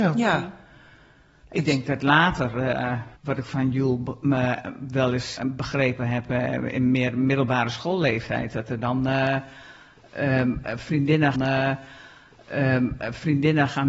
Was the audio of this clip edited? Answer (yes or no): yes